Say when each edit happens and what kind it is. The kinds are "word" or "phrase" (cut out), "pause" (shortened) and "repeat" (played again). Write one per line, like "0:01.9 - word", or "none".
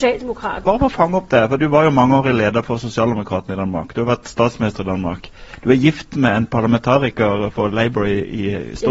0:01.6 - word